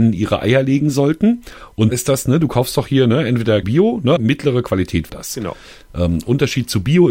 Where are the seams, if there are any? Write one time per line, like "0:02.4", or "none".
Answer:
0:01.9
0:03.6
0:04.2
0:05.1